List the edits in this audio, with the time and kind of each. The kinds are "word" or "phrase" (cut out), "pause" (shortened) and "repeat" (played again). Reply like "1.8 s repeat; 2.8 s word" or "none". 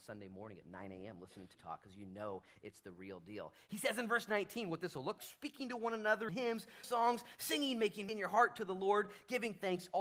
1.5 s word; 5.2 s word; 6.3 s phrase; 6.8 s word; 8.1 s word